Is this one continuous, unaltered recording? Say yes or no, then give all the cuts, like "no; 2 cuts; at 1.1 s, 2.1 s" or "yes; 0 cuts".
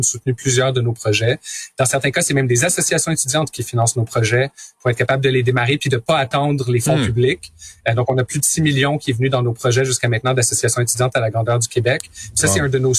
yes; 0 cuts